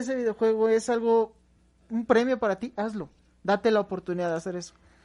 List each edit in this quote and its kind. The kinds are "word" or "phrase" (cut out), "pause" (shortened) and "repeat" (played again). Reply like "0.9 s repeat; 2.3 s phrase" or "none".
none